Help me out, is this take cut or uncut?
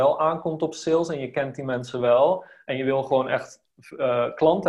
uncut